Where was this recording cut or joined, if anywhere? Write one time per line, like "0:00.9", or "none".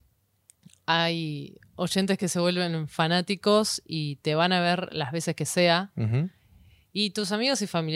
none